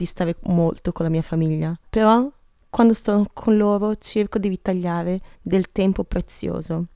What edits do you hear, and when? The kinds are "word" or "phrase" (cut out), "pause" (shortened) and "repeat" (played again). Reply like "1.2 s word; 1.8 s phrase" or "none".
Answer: 1.9 s pause; 5.3 s pause